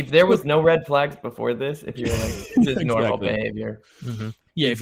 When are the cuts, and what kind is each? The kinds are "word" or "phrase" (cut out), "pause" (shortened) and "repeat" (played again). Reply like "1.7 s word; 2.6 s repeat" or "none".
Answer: none